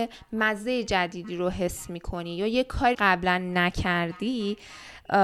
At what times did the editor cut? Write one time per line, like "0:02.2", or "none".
0:02.9